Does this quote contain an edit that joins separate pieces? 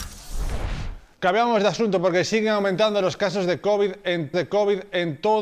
yes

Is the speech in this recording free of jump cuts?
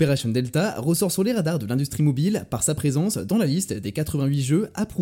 yes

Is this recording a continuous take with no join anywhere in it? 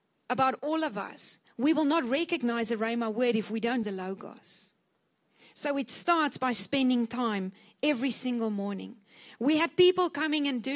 no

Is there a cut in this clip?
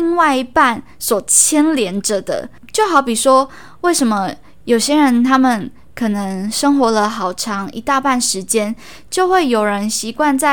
no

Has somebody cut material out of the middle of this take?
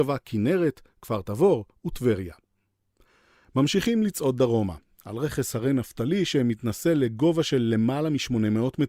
no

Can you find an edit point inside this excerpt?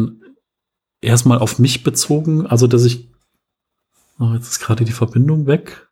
no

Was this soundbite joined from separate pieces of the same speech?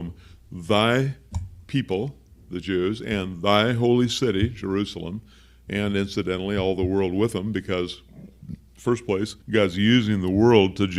yes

